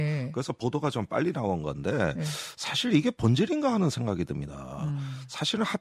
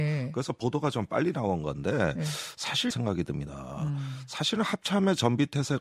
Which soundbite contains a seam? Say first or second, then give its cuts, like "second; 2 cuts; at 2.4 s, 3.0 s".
second; 1 cut; at 2.9 s